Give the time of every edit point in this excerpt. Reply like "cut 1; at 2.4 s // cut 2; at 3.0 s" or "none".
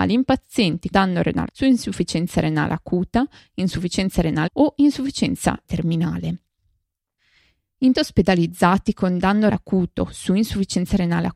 cut 1; at 0.9 s // cut 2; at 1.5 s // cut 3; at 4.5 s // cut 4; at 5.6 s // cut 5; at 7.9 s // cut 6; at 9.5 s